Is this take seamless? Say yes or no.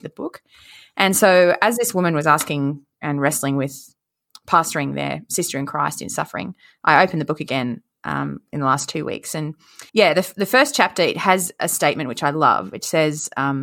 no